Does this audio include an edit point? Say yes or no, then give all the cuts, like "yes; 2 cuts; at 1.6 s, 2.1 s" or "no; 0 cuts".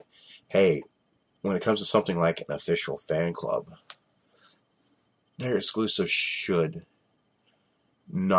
no; 0 cuts